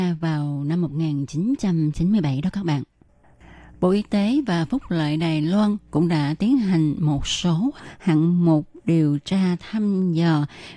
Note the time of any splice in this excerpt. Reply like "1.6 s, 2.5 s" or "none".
none